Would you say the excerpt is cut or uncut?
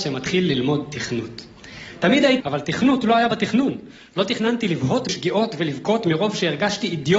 cut